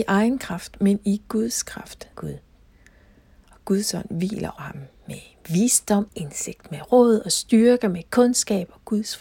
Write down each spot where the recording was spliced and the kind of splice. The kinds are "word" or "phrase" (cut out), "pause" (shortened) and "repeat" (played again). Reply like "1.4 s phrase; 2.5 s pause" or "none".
2.1 s phrase; 4.6 s word; 6.1 s word

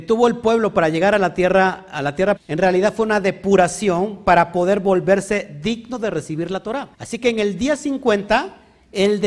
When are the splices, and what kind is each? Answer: 2.4 s word; 6.9 s pause

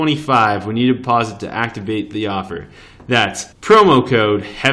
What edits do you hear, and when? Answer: 3.5 s pause

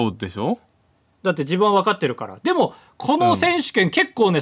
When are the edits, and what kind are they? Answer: none

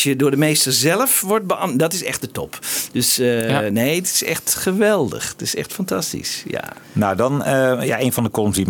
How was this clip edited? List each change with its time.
6.8 s pause

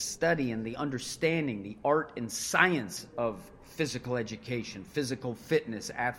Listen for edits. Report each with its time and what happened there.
none

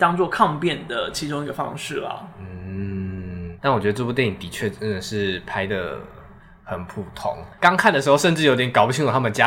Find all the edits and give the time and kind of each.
7.5 s pause

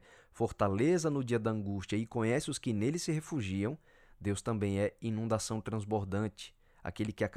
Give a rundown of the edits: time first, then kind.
none

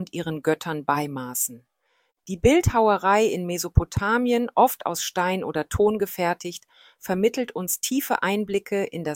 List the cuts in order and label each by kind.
none

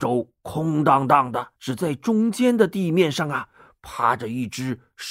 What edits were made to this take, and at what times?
1.6 s pause

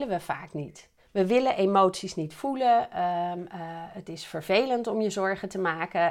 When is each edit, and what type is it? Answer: 1.0 s pause

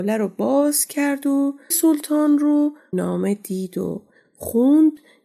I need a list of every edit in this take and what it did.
1.7 s word; 2.9 s phrase

